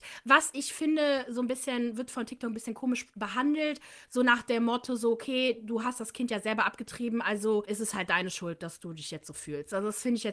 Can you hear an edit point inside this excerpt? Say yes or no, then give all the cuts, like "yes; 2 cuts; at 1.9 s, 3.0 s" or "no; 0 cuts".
no; 0 cuts